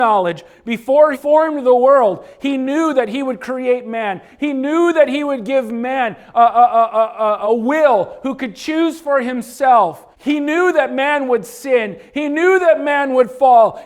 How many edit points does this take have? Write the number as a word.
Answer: three